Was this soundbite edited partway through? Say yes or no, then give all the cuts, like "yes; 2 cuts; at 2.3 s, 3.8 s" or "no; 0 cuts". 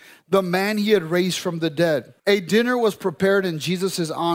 yes; 1 cut; at 2.2 s